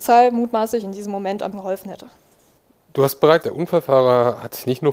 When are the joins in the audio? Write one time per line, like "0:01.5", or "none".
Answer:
0:01.5
0:03.4